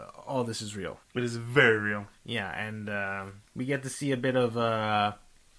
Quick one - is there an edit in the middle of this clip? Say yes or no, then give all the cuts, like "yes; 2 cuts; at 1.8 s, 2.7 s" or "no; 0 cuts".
yes; 3 cuts; at 1.0 s, 2.2 s, 3.5 s